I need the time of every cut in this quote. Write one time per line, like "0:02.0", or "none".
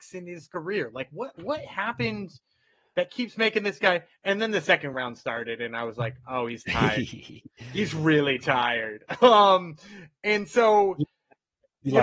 none